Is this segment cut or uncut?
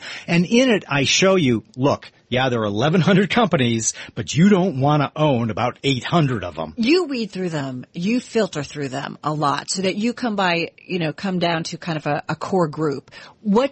cut